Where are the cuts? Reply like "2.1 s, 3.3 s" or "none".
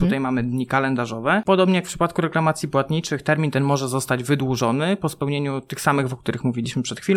6.1 s